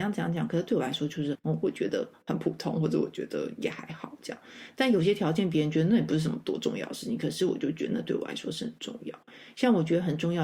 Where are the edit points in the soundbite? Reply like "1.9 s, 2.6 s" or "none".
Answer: 1.3 s